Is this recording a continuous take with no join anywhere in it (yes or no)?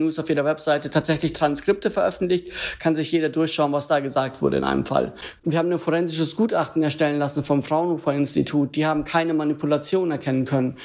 yes